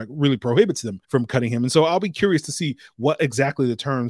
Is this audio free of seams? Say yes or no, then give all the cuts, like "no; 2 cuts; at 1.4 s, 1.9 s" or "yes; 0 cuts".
no; 1 cut; at 1.0 s